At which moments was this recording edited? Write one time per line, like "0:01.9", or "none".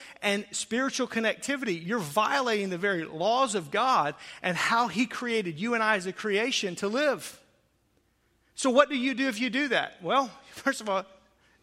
none